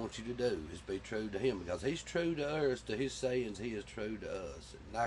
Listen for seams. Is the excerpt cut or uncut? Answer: uncut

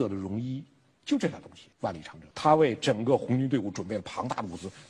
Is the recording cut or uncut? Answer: cut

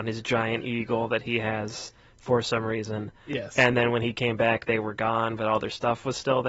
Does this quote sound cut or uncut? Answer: uncut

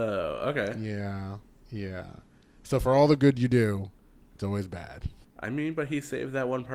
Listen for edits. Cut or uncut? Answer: uncut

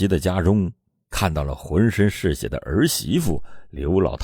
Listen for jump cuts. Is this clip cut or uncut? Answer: uncut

